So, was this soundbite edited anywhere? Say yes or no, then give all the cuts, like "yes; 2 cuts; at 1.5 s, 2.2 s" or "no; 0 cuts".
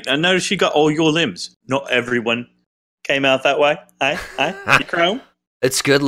yes; 1 cut; at 4.8 s